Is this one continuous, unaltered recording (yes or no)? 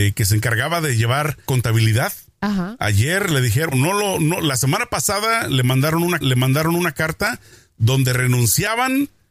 no